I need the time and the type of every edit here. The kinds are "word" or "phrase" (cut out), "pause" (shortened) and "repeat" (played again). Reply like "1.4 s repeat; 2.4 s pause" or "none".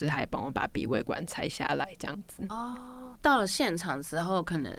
none